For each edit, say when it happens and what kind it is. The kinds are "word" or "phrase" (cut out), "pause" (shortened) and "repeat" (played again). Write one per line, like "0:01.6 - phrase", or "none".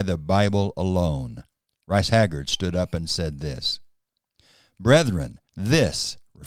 0:01.7 - pause
0:05.5 - pause